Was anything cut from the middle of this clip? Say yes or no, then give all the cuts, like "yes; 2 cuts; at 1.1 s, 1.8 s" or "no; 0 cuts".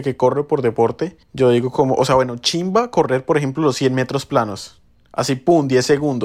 no; 0 cuts